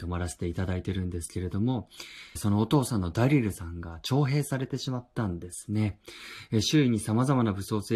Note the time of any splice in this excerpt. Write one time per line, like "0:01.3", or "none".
0:02.4